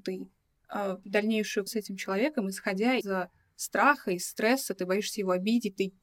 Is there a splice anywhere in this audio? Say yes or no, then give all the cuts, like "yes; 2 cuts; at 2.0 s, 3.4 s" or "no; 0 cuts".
yes; 3 cuts; at 1.0 s, 1.7 s, 3.0 s